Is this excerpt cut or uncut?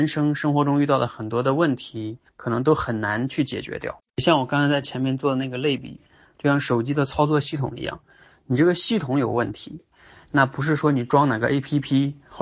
cut